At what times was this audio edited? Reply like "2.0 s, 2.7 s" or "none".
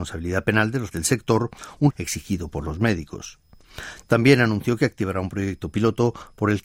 0.9 s, 1.9 s